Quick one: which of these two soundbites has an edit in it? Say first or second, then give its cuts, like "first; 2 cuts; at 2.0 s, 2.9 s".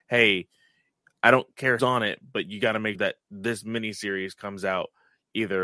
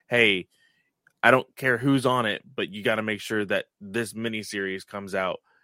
first; 2 cuts; at 1.8 s, 3.0 s